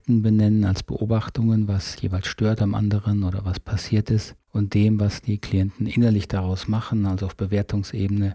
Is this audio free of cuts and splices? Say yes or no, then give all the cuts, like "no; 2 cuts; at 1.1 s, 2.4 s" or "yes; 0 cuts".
no; 2 cuts; at 2.0 s, 4.4 s